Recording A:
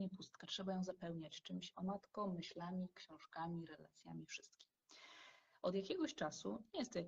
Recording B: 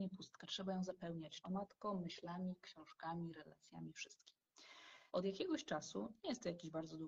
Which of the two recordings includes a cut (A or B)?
B